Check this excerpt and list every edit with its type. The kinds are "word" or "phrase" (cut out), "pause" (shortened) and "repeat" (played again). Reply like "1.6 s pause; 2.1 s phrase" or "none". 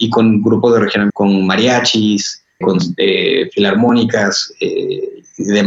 1.1 s word; 2.6 s word